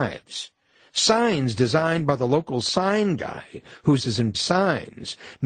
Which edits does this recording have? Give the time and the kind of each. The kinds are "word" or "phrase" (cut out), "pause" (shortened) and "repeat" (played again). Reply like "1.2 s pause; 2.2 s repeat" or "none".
4.0 s word; 4.3 s word